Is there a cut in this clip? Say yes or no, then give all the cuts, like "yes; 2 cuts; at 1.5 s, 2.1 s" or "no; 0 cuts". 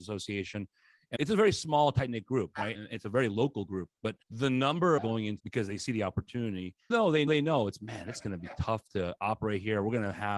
yes; 7 cuts; at 1.2 s, 2.7 s, 4.2 s, 5.0 s, 5.4 s, 6.9 s, 7.3 s